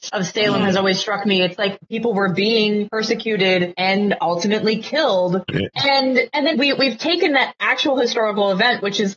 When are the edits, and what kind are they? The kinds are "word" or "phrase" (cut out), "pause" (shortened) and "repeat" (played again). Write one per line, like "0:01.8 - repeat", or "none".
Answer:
0:06.5 - word